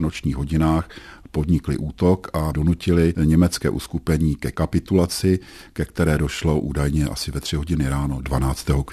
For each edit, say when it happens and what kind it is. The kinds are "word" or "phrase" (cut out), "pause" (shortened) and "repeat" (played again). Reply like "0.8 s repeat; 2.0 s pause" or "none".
none

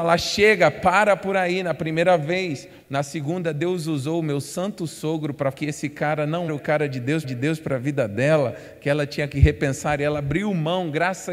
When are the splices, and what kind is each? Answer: 2.8 s pause; 5.5 s word; 6.5 s word; 7.2 s repeat

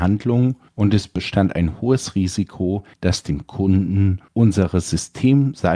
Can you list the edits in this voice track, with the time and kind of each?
none

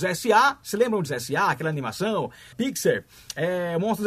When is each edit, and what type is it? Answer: 1.1 s word; 2.5 s word

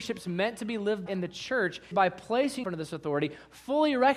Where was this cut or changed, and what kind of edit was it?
1.1 s word; 1.9 s word; 2.6 s word

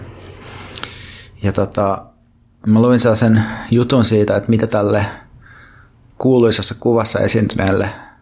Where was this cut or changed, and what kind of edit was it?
none

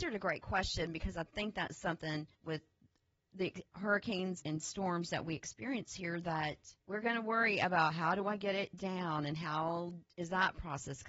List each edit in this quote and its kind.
2.3 s pause; 4.4 s word; 6.8 s pause

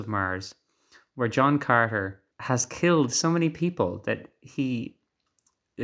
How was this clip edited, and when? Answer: 2.3 s pause

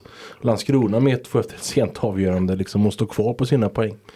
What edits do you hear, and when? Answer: none

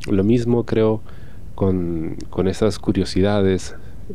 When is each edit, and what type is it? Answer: none

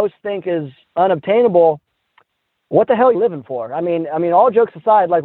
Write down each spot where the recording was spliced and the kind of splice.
3.1 s word

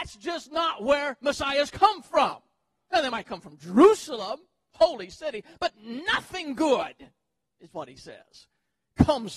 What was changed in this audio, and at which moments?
none

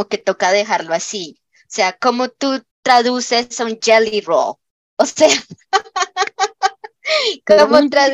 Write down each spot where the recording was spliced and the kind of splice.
2.7 s pause

